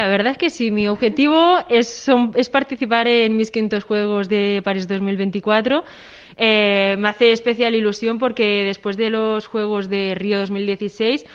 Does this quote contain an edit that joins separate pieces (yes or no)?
no